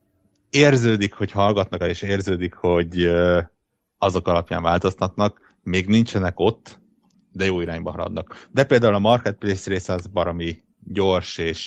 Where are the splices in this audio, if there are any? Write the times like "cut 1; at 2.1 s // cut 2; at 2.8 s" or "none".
cut 1; at 1.8 s // cut 2; at 7.1 s